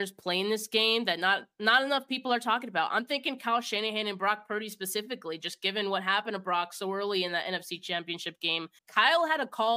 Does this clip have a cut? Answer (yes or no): yes